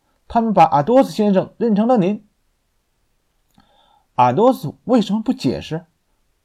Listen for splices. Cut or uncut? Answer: uncut